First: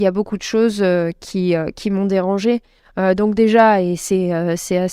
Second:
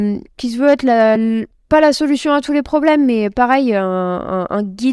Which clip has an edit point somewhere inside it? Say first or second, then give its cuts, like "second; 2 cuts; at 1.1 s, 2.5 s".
second; 1 cut; at 1.2 s